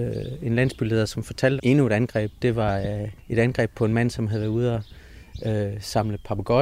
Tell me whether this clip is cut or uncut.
cut